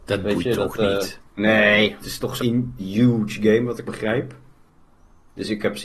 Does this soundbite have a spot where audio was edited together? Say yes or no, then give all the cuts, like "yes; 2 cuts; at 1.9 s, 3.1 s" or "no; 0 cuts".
yes; 4 cuts; at 2.0 s, 2.4 s, 2.8 s, 3.9 s